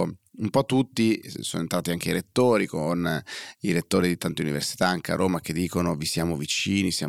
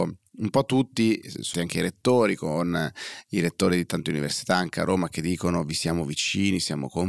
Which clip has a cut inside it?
second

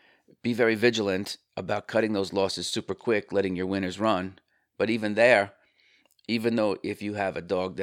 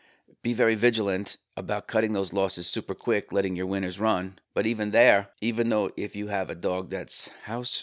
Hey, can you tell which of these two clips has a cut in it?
second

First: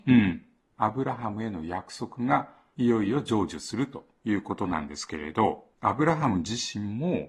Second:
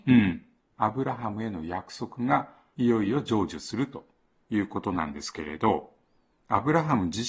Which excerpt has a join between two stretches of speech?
first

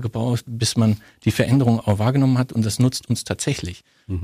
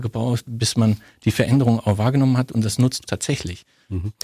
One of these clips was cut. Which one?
second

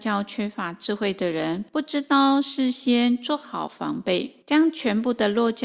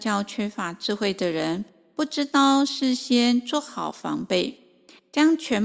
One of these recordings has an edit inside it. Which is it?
first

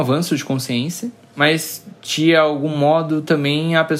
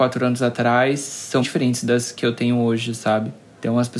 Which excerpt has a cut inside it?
second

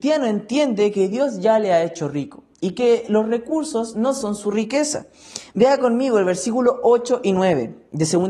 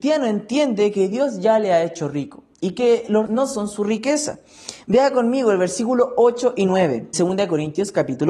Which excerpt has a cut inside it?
second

